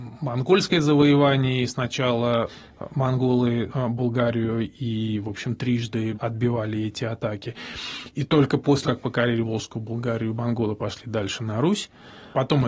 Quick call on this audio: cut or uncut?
cut